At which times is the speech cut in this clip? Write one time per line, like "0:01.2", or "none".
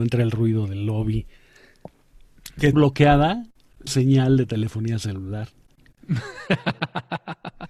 0:02.7
0:03.9